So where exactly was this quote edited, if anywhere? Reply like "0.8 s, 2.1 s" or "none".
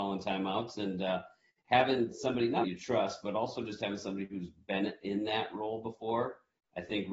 2.6 s